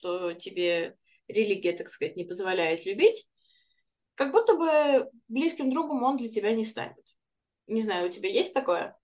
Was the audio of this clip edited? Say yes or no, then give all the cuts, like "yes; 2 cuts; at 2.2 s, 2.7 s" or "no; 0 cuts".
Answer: no; 0 cuts